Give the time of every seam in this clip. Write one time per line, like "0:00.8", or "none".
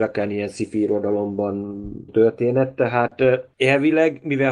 0:02.1